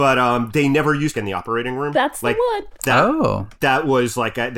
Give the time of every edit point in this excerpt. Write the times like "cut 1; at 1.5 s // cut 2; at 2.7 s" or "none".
cut 1; at 1.1 s